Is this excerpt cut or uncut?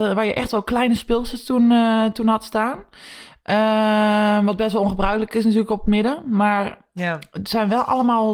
uncut